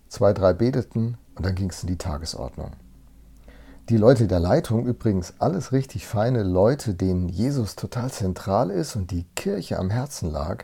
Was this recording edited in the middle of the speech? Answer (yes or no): yes